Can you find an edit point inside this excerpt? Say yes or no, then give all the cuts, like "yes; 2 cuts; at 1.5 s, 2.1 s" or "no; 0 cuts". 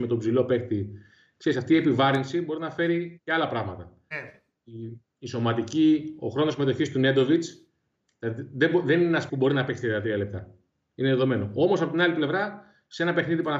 yes; 1 cut; at 9.3 s